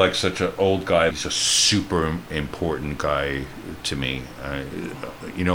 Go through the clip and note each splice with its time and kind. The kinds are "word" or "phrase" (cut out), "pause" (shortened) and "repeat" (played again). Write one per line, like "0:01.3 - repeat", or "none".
0:01.1 - word